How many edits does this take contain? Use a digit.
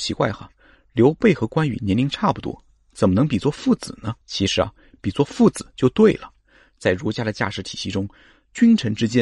1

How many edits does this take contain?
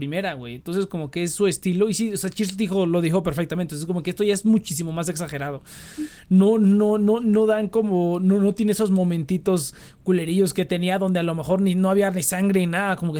0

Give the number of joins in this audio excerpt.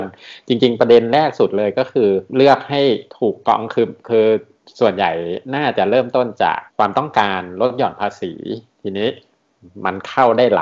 4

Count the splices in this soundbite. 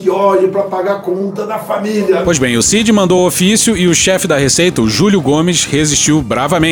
0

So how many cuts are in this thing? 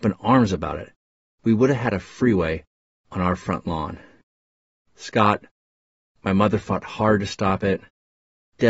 0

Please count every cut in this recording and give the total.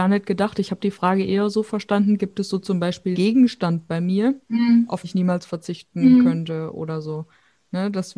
3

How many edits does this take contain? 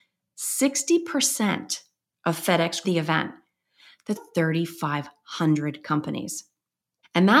2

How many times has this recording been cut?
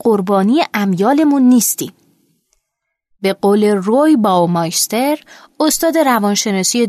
0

